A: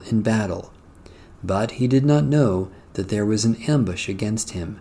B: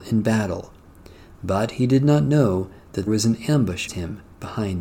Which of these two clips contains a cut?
B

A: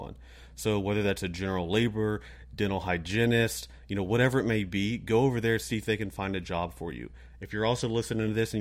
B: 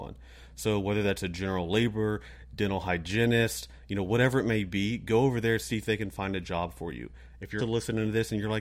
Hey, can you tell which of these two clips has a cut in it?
B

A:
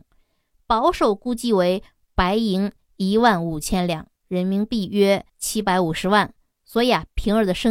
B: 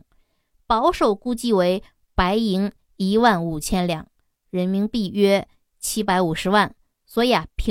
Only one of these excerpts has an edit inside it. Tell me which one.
A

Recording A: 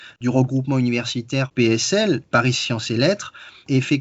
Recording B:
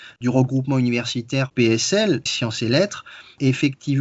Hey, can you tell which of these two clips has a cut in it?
B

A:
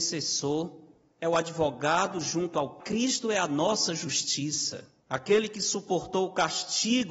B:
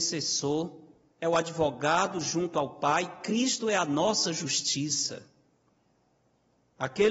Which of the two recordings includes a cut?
A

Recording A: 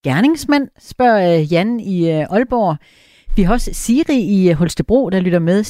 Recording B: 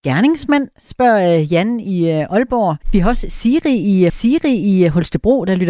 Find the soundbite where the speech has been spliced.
B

